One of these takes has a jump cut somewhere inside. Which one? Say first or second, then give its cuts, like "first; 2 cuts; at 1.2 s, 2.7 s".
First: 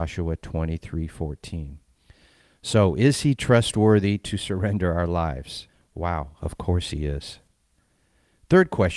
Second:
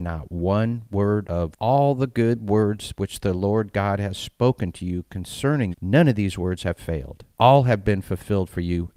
second; 2 cuts; at 5.7 s, 7.3 s